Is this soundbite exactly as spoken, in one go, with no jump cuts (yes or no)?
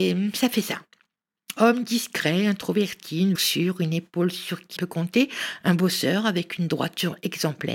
no